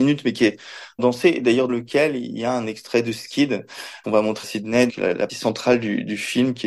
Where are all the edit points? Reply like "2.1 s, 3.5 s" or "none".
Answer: 1.0 s, 1.7 s, 4.0 s, 4.4 s, 4.9 s, 5.3 s